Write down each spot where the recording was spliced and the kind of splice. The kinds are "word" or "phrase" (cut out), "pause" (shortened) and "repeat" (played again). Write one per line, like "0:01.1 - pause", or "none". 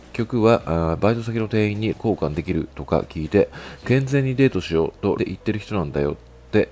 0:01.9 - word
0:05.2 - word